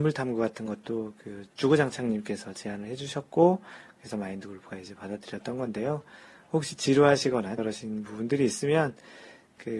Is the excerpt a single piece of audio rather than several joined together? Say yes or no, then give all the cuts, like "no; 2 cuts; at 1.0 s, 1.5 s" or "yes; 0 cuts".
no; 2 cuts; at 1.5 s, 7.6 s